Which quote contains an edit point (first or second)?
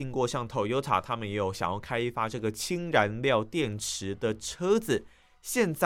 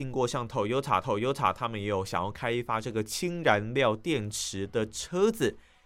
second